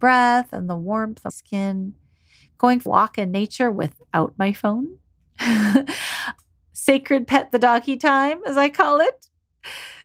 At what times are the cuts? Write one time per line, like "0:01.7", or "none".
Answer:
0:01.3
0:02.9